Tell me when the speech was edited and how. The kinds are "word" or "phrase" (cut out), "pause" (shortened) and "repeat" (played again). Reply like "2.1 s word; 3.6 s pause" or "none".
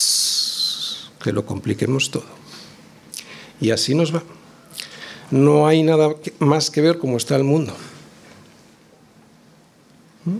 none